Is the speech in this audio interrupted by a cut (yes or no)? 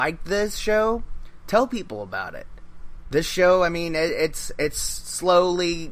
no